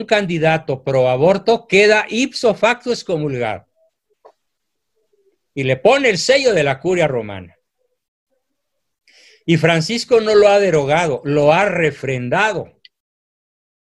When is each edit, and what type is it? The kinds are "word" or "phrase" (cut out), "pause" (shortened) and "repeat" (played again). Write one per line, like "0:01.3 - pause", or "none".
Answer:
none